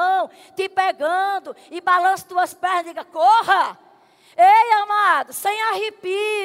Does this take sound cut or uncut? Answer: uncut